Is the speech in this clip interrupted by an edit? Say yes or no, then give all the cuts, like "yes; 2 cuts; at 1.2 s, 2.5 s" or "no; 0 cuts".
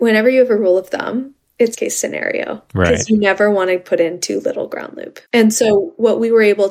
yes; 3 cuts; at 1.7 s, 2.7 s, 5.3 s